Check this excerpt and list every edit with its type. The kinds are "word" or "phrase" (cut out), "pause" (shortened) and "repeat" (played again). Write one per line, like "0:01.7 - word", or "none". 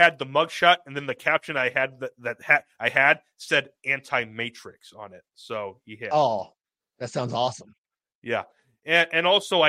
none